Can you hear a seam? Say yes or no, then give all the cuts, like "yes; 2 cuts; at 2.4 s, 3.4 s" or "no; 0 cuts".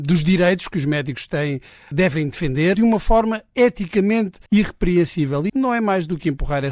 yes; 4 cuts; at 1.9 s, 2.7 s, 4.5 s, 5.5 s